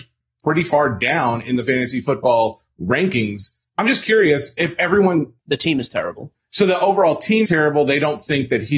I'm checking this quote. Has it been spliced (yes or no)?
yes